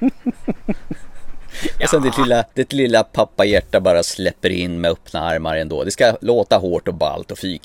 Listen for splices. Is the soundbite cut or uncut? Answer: cut